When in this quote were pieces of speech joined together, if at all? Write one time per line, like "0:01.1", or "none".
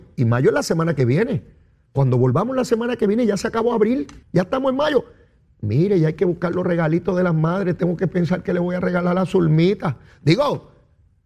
0:04.2